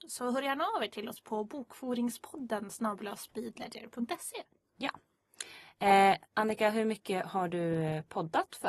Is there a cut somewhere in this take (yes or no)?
yes